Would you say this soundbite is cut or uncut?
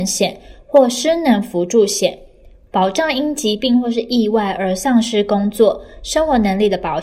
uncut